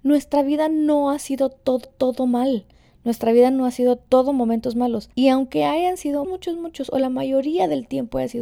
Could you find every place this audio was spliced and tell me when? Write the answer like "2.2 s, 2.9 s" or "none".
1.8 s, 5.1 s, 6.2 s